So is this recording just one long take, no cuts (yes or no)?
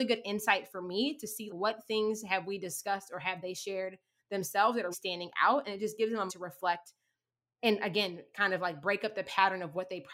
no